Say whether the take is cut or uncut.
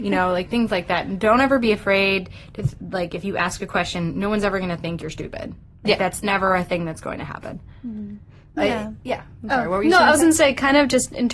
uncut